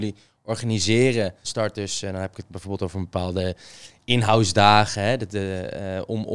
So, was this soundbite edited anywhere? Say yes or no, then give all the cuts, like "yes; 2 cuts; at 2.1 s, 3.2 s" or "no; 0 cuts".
yes; 1 cut; at 1.4 s